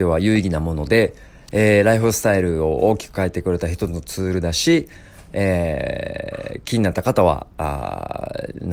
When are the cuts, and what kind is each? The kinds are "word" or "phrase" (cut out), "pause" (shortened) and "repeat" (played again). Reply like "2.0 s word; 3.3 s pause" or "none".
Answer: none